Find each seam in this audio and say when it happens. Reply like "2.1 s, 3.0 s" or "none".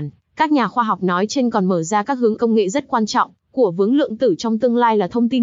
2.4 s

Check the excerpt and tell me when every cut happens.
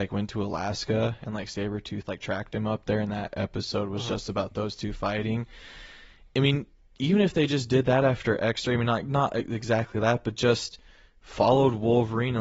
none

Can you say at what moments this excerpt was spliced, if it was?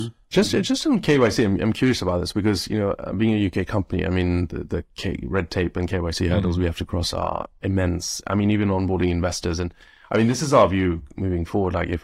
none

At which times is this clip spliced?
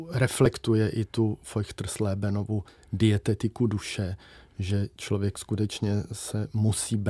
none

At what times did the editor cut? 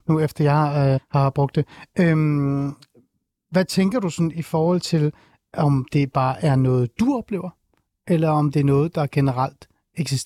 1.0 s

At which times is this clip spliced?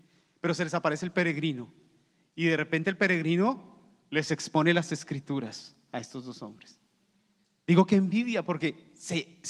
none

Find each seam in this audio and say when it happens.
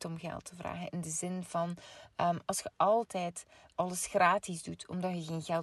none

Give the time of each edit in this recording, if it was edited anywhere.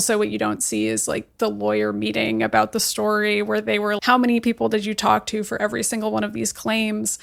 4.0 s

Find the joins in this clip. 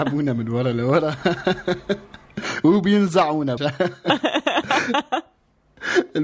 3.6 s

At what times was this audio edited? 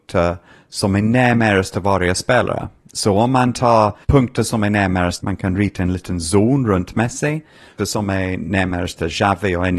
4.0 s, 5.2 s, 7.8 s

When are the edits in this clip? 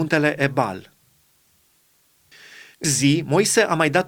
2.8 s

